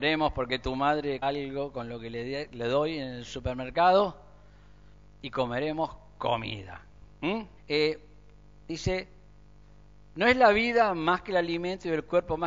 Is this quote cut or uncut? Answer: cut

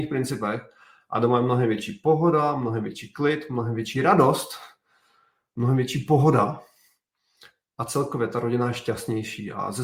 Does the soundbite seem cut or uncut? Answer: uncut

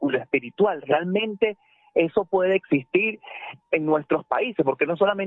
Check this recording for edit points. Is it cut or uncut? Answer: cut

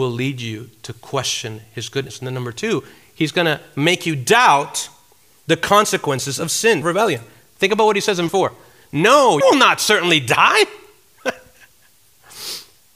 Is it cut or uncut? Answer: cut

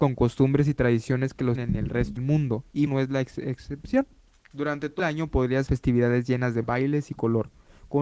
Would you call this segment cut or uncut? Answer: cut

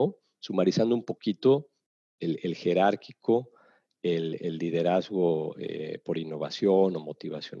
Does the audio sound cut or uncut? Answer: uncut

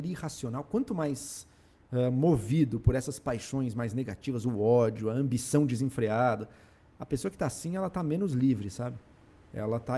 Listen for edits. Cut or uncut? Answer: uncut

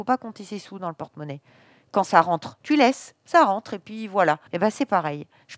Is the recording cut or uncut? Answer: cut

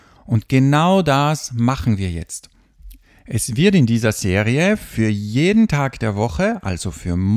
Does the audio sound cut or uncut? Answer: uncut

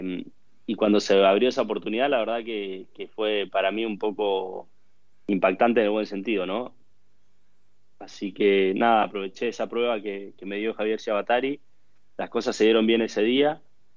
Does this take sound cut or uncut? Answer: uncut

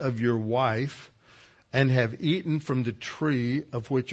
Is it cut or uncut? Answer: uncut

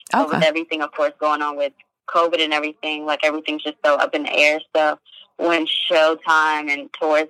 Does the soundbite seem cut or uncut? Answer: uncut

